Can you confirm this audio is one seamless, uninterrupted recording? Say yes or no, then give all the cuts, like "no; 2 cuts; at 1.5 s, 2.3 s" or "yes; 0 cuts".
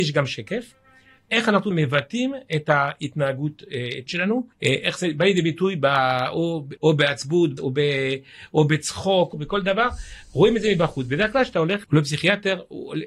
no; 7 cuts; at 1.7 s, 4.1 s, 4.5 s, 6.8 s, 7.6 s, 9.3 s, 11.8 s